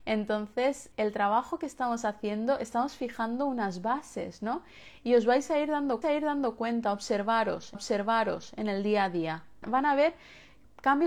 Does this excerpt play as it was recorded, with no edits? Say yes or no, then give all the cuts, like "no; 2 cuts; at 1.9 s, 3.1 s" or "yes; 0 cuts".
no; 4 cuts; at 0.9 s, 6.0 s, 7.7 s, 9.6 s